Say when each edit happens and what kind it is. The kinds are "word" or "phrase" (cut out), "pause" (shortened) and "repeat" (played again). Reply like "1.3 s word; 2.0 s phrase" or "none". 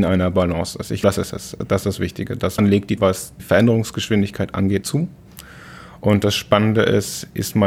1.0 s word; 2.6 s word; 3.0 s word; 3.4 s word; 4.8 s word

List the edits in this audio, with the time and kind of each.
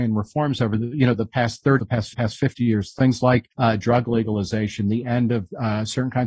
1.8 s word; 2.1 s repeat; 3.5 s pause

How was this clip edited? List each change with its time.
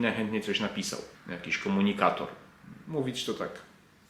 1.1 s pause

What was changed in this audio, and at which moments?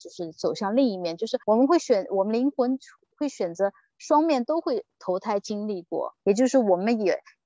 1.4 s pause; 6.2 s pause

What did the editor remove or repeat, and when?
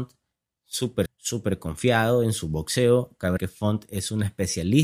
1.1 s word; 3.4 s word

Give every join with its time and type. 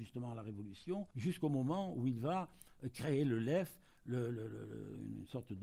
1.1 s pause

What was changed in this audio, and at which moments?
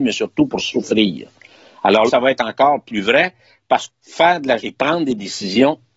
2.1 s word; 3.9 s phrase; 4.6 s word

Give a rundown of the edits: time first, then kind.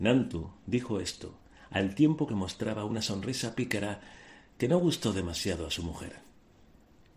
none

